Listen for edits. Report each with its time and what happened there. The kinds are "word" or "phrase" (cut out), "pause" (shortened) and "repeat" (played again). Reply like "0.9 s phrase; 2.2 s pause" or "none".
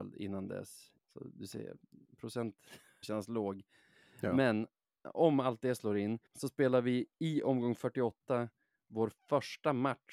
1.0 s pause; 3.0 s phrase; 6.3 s pause